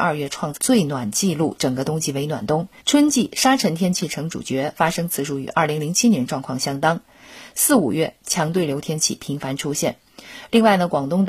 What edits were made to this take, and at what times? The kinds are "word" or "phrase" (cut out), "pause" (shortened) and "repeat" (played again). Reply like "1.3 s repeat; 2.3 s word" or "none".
2.8 s pause